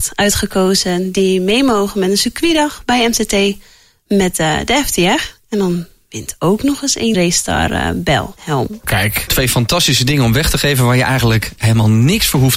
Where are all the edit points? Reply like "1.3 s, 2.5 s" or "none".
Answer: 7.1 s